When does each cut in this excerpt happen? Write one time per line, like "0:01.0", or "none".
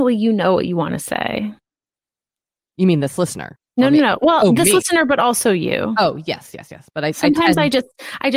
0:03.7